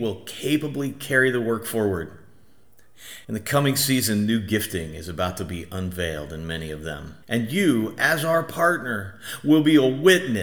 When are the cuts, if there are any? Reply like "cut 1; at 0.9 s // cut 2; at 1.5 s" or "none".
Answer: cut 1; at 3.2 s // cut 2; at 7.2 s